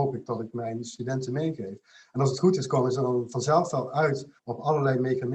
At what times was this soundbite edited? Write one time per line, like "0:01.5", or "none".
0:04.4